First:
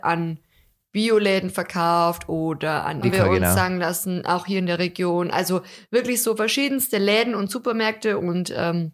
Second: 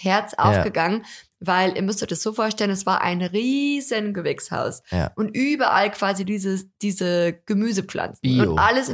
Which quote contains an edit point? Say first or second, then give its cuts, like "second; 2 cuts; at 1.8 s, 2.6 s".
first; 1 cut; at 3.0 s